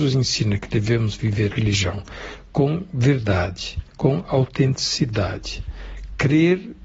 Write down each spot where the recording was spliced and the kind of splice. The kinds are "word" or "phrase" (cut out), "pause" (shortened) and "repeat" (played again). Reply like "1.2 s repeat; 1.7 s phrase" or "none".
1.5 s word; 3.9 s pause